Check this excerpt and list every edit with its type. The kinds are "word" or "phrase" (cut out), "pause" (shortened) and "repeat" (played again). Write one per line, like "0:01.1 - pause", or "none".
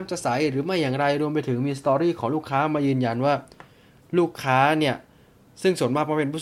none